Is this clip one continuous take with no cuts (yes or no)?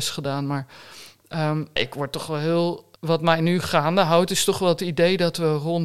no